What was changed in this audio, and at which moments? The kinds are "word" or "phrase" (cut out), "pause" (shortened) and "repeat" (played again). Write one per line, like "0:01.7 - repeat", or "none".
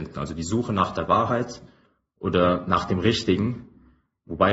none